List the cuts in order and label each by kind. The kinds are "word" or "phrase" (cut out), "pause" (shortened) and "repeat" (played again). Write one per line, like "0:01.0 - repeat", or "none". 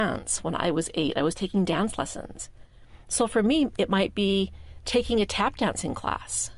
none